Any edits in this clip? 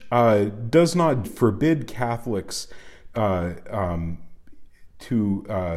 yes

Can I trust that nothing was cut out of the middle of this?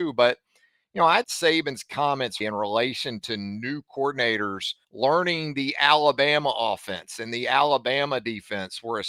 no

